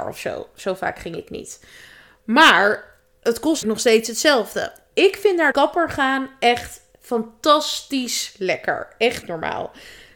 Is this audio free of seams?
no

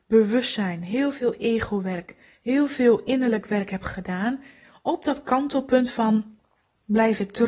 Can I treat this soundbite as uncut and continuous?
yes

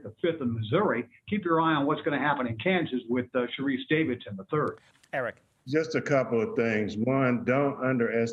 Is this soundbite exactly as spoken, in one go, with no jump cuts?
yes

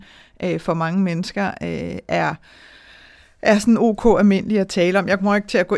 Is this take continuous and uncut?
yes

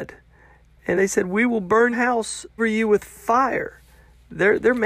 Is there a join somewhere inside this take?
yes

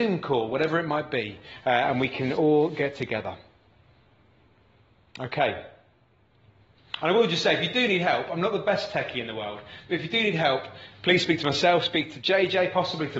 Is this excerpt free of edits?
yes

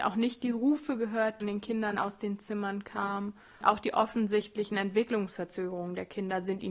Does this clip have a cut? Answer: yes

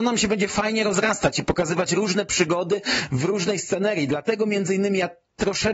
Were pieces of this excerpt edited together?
no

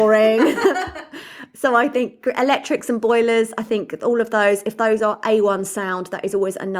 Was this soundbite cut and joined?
no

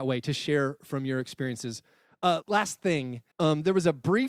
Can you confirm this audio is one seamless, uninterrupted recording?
no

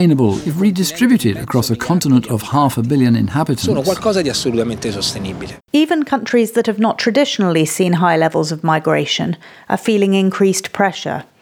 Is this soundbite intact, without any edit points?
yes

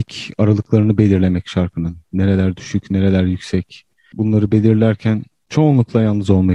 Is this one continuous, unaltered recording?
yes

